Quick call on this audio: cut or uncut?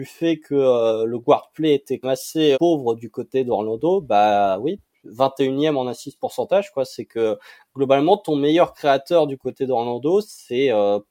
cut